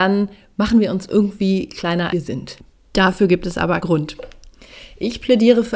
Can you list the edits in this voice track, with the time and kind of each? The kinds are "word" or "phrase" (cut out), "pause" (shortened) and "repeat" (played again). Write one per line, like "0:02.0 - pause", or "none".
0:02.1 - word
0:03.8 - word